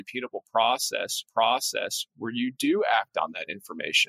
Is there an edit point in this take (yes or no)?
yes